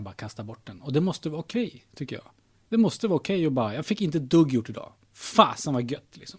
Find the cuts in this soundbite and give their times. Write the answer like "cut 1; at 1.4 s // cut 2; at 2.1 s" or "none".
none